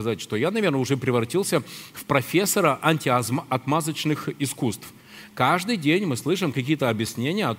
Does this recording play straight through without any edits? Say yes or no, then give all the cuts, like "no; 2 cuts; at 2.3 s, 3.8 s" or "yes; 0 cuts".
yes; 0 cuts